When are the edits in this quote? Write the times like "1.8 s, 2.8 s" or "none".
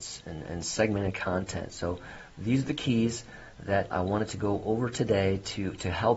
3.9 s